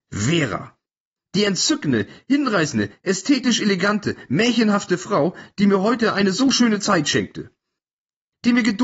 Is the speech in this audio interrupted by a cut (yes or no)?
no